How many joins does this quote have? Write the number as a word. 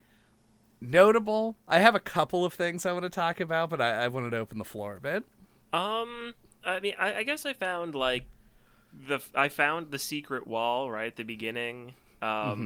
zero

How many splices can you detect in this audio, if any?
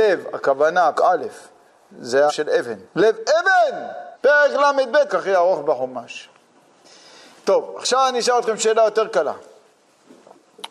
five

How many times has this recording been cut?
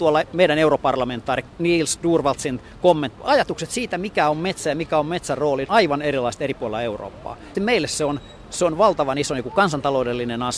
four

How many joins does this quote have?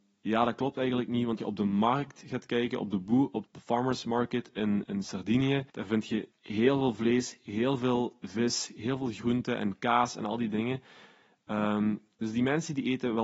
six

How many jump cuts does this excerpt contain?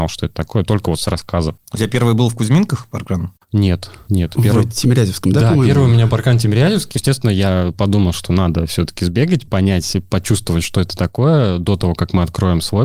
two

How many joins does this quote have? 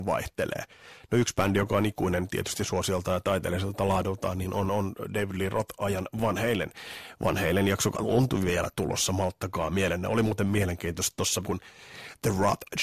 two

